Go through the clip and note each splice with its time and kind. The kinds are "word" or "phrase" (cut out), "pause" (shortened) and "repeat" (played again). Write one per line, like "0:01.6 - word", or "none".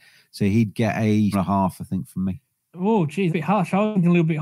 0:01.3 - word
0:03.3 - word